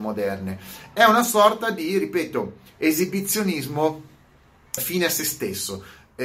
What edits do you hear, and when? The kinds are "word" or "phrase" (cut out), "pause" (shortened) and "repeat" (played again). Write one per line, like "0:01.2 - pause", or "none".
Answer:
0:04.8 - word

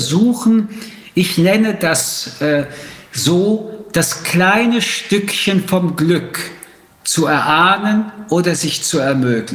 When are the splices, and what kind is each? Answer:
none

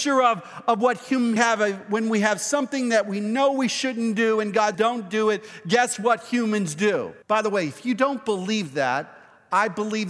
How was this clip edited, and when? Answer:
0:01.4 - phrase
0:04.7 - word
0:07.2 - pause

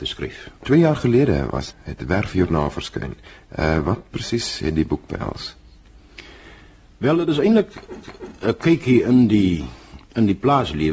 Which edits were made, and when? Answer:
0:01.7 - word
0:08.0 - repeat

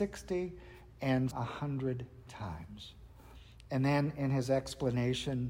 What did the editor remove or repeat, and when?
0:01.3 - word

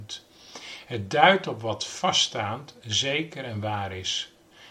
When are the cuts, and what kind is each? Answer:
none

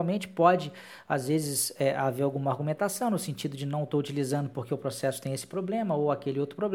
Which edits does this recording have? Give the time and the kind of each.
none

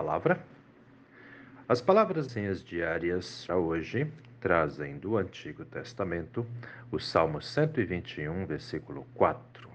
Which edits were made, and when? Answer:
0:02.3 - word
0:03.5 - word

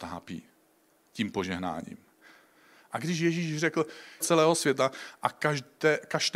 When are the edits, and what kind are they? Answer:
0:04.2 - phrase

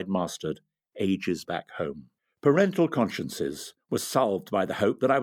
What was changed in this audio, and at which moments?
0:01.4 - word
0:02.2 - pause

